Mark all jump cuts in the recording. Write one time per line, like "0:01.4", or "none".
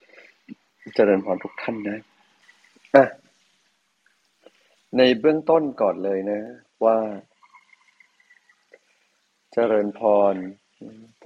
none